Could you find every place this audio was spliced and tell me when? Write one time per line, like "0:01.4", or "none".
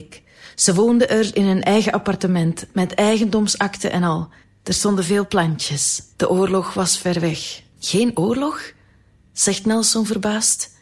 0:04.4
0:06.1
0:07.7